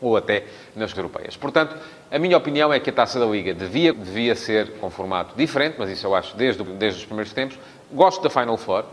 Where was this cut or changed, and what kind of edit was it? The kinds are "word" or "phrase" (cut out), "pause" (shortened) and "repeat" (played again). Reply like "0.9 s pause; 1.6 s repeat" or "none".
0.9 s word; 3.9 s phrase; 6.7 s word